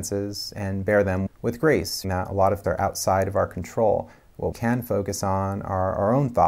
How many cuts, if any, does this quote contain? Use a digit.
4